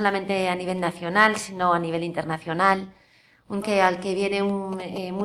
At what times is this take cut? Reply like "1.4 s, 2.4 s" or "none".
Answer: 3.6 s